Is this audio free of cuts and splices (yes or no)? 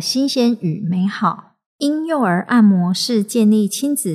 no